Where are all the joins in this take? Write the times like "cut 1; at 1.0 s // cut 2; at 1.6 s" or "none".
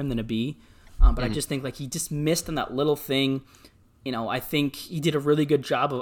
none